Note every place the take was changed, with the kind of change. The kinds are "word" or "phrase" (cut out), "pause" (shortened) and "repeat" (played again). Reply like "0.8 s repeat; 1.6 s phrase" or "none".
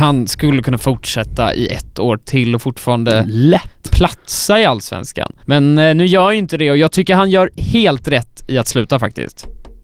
5.4 s pause

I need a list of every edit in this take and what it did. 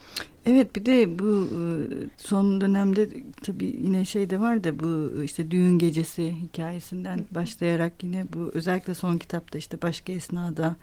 2.1 s pause

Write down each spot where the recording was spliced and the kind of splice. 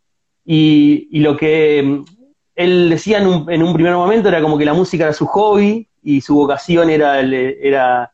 none

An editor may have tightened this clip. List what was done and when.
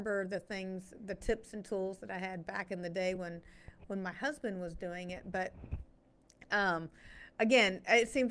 none

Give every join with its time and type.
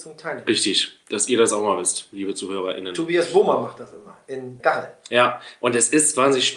4.6 s word

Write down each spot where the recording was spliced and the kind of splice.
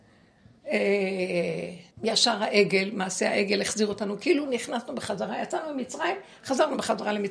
1.9 s pause

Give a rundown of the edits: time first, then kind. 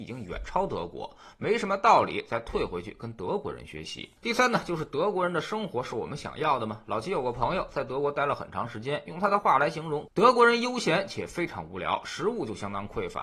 4.2 s pause

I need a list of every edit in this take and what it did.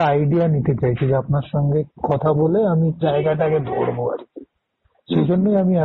1.9 s pause; 3.0 s word

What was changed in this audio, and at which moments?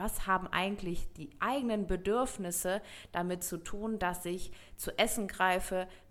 none

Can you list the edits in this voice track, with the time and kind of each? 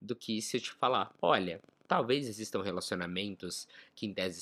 none

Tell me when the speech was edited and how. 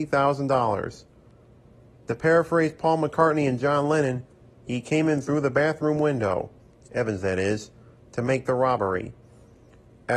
none

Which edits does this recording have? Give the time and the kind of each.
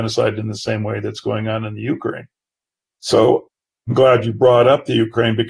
none

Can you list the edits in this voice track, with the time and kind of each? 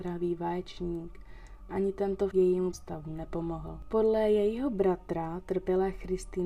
1.7 s word; 2.3 s word; 2.7 s word

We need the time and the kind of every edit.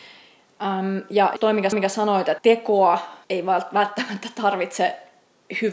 1.4 s word; 1.7 s repeat; 2.4 s word; 3.2 s pause

